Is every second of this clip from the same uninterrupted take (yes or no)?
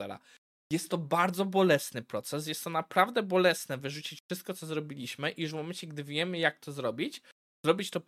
yes